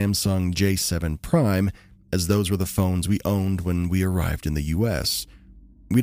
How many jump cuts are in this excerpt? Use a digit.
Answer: 0